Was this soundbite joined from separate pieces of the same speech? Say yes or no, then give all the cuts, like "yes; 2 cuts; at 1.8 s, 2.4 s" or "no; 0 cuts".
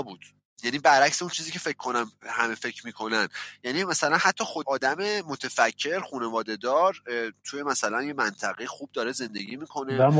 yes; 1 cut; at 4.6 s